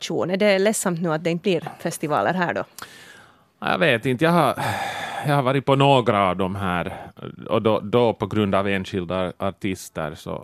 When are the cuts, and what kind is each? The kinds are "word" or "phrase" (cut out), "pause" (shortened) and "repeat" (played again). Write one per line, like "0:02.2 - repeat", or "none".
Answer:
none